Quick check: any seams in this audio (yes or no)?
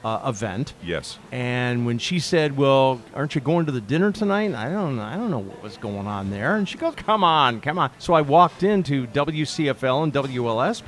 yes